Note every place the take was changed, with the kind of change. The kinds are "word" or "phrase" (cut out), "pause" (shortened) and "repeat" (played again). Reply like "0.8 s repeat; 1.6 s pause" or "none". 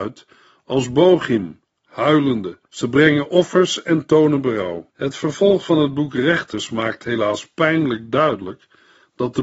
2.7 s pause; 4.9 s pause